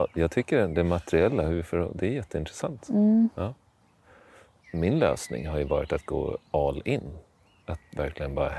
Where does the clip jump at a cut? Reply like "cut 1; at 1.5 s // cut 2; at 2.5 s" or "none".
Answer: none

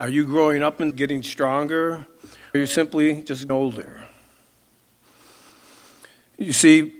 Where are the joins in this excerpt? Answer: cut 1; at 0.9 s // cut 2; at 2.5 s // cut 3; at 3.5 s

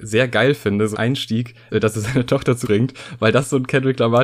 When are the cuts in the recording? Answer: cut 1; at 0.9 s // cut 2; at 1.7 s // cut 3; at 2.6 s

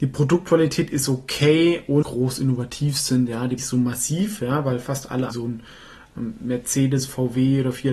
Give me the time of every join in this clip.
cut 1; at 2.0 s // cut 2; at 3.6 s // cut 3; at 5.3 s

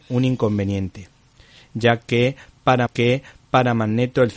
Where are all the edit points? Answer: cut 1; at 2.9 s

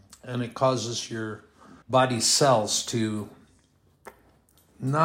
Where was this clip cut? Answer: cut 1; at 1.8 s

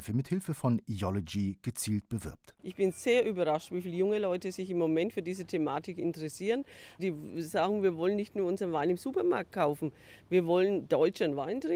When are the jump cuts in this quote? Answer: cut 1; at 2.6 s

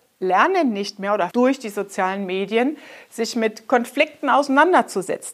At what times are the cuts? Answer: cut 1; at 1.3 s

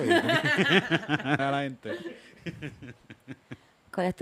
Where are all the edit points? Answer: cut 1; at 1.4 s

